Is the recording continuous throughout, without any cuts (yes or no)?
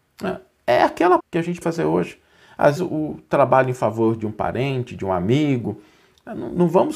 no